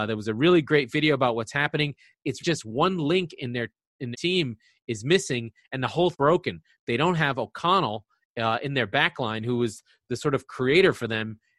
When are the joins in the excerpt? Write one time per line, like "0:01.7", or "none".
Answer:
0:02.4
0:04.1
0:06.1